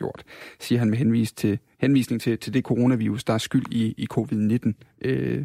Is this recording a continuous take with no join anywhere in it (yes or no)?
yes